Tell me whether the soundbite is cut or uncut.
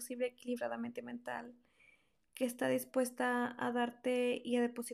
uncut